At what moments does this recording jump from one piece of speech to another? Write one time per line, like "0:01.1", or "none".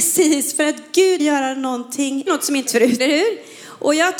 0:01.2
0:02.3
0:02.7
0:03.0